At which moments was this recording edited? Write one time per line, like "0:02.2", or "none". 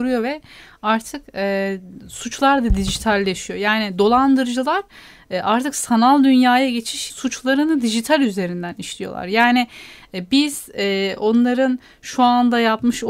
0:07.1